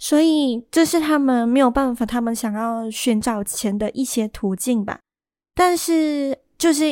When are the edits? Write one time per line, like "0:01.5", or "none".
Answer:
0:05.1